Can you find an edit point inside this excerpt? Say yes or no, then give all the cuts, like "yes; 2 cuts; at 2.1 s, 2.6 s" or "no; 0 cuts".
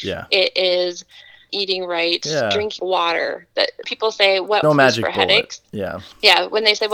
yes; 4 cuts; at 1.5 s, 2.8 s, 3.8 s, 4.6 s